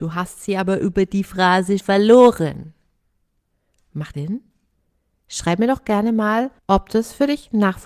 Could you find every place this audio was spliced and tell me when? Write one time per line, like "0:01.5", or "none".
0:01.8
0:04.1
0:06.6